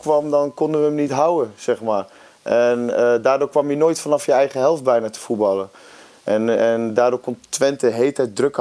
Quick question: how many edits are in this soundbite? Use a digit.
0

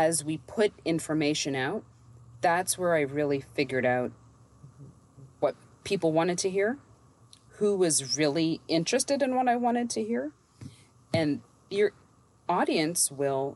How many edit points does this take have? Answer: 0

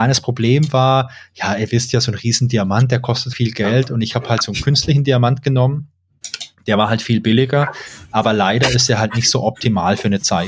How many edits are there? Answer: 1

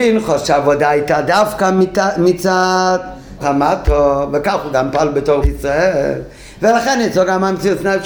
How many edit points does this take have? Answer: 2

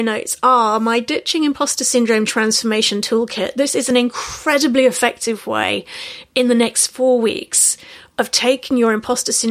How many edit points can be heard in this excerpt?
0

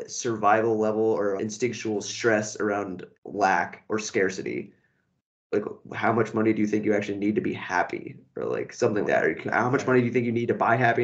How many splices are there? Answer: 3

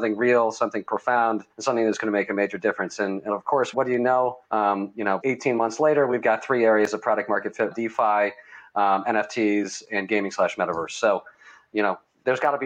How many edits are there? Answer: 5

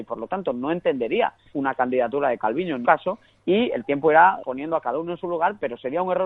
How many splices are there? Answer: 3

